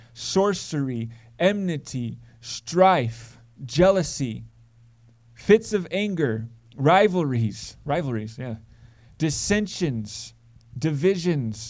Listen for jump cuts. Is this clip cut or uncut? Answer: uncut